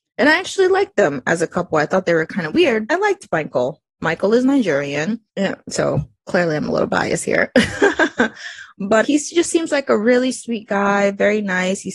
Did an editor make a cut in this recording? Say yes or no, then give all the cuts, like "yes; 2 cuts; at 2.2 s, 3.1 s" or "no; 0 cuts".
yes; 3 cuts; at 2.9 s, 5.3 s, 9.0 s